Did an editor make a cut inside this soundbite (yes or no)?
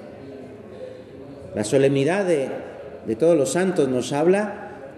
no